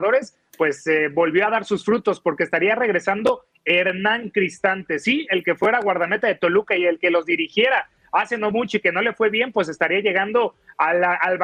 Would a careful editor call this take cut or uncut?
uncut